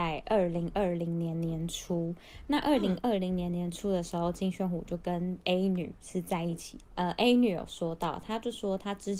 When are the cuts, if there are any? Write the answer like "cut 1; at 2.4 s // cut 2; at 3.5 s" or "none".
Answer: cut 1; at 6.8 s